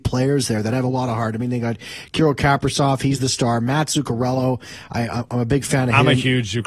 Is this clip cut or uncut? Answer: uncut